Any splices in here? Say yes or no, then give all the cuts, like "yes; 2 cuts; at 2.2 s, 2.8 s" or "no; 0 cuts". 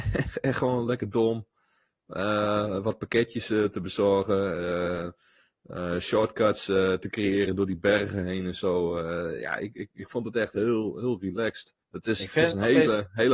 yes; 1 cut; at 11.8 s